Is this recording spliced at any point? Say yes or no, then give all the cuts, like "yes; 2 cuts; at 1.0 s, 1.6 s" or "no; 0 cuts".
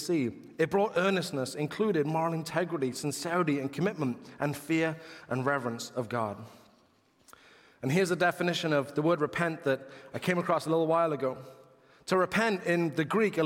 no; 0 cuts